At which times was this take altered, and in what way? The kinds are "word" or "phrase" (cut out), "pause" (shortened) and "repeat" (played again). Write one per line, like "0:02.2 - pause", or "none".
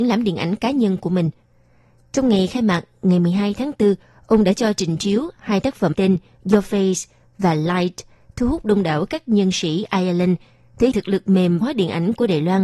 0:05.9 - word
0:10.9 - word
0:11.6 - word